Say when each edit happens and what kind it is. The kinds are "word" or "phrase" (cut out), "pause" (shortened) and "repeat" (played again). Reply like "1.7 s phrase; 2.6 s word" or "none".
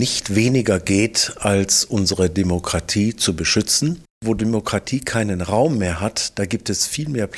none

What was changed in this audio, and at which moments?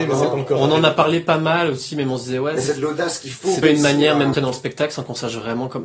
3.6 s word; 4.3 s phrase

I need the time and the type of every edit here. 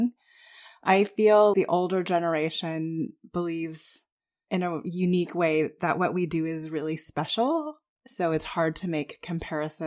1.5 s word

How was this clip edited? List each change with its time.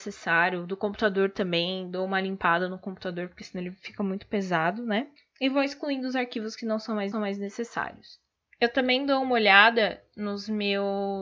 5.2 s pause; 7.1 s repeat

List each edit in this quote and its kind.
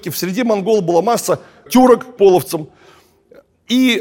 1.7 s word; 2.2 s word

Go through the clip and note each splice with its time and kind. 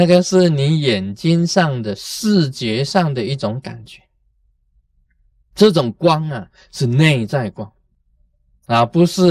none

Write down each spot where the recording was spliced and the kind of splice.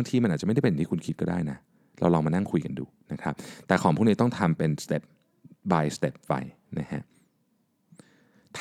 none

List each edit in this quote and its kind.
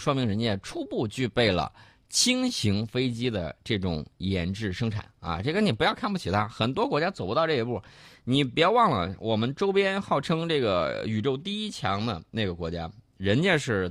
12.3 s pause

